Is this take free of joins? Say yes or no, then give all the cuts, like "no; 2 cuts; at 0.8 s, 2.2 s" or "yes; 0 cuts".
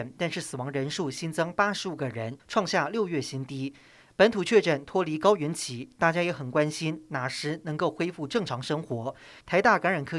yes; 0 cuts